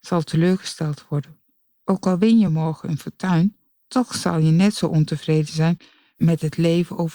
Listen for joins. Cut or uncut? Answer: uncut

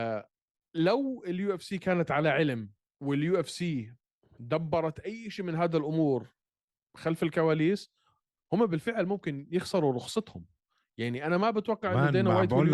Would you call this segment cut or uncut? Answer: uncut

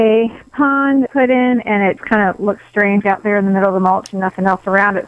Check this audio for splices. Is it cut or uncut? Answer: cut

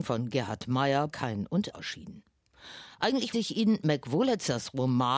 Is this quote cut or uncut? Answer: cut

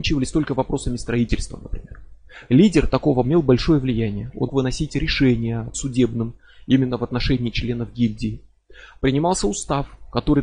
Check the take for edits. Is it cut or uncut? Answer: cut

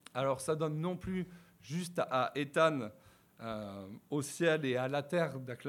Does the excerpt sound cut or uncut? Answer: uncut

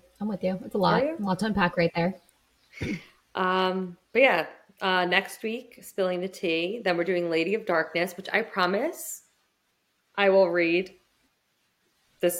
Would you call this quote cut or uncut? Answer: uncut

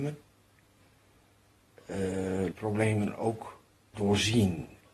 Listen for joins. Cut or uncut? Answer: cut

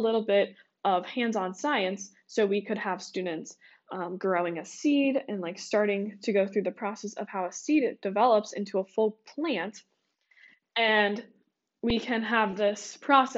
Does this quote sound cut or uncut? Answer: uncut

